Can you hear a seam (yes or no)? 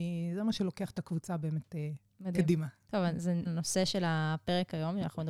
yes